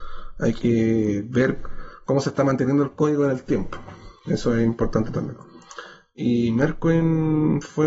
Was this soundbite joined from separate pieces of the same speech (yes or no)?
no